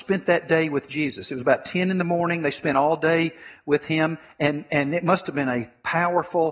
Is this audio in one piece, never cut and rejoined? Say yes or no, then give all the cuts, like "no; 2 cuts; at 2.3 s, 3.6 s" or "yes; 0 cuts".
yes; 0 cuts